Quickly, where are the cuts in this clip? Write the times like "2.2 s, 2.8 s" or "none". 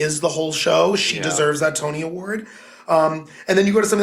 none